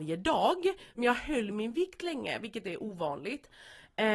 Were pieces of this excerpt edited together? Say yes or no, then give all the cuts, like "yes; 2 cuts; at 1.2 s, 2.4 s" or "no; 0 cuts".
no; 0 cuts